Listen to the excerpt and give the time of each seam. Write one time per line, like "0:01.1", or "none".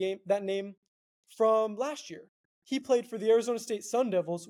none